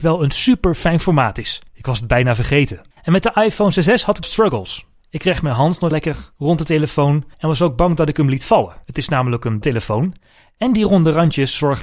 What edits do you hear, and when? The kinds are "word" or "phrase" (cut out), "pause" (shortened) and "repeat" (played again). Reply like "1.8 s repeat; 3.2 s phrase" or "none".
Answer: 1.7 s pause; 2.9 s pause; 4.2 s phrase; 5.9 s word; 7.3 s pause; 8.8 s pause; 9.6 s phrase